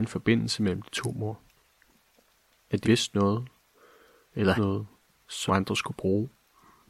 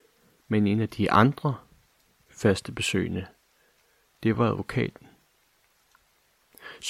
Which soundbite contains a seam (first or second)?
first